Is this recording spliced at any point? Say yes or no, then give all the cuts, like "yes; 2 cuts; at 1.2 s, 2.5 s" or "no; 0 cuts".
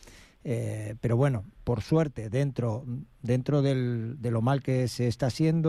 no; 0 cuts